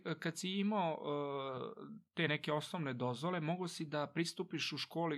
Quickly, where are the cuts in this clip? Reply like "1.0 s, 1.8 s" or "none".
none

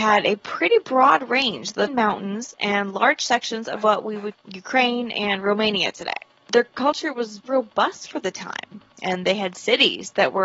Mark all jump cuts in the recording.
1.9 s, 4.3 s, 6.4 s, 7.4 s

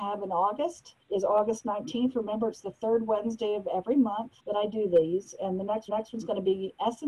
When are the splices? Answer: 1.0 s, 4.4 s, 5.9 s

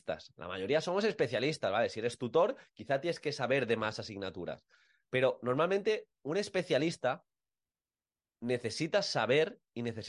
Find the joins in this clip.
none

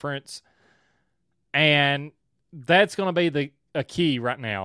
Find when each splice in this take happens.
none

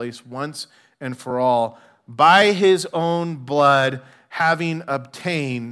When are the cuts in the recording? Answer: none

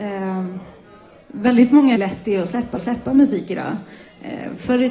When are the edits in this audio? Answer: 2.0 s, 2.8 s

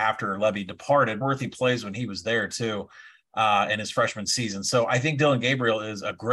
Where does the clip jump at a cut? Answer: 1.2 s

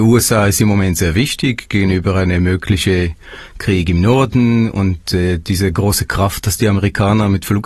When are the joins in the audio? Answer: none

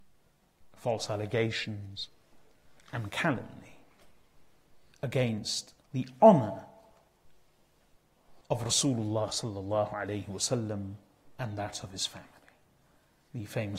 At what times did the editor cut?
5.8 s, 8.4 s

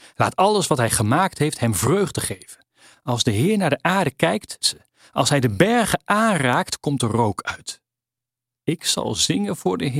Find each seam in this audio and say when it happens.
4.6 s

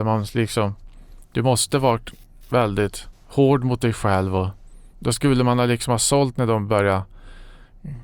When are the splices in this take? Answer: 4.9 s, 6.3 s

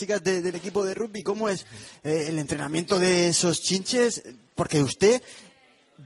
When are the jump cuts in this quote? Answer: none

